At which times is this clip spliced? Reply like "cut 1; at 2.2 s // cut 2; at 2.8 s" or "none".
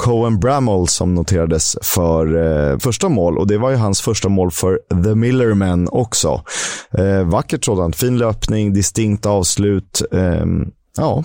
cut 1; at 2.8 s